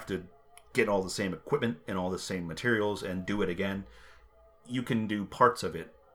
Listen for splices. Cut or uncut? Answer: uncut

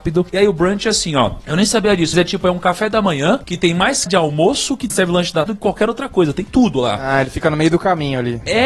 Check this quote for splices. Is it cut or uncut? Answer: cut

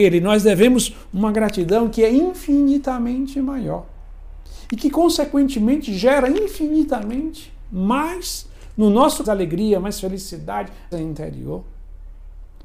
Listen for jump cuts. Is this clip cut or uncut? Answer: cut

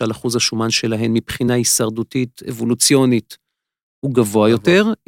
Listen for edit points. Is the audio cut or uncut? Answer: uncut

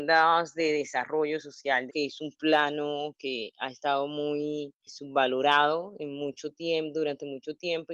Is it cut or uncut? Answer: cut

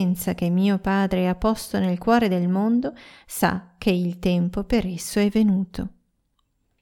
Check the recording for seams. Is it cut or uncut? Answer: uncut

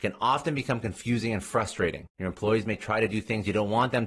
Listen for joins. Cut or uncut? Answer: uncut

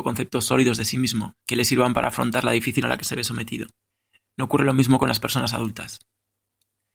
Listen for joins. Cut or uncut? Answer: cut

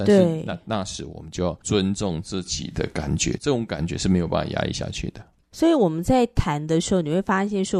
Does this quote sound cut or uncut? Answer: uncut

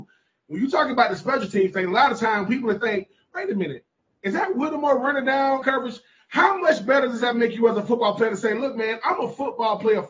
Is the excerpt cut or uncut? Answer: cut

